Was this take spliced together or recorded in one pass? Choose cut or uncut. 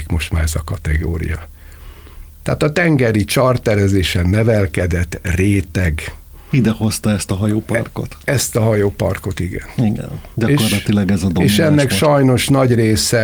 uncut